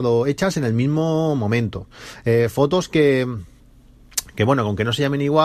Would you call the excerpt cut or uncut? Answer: uncut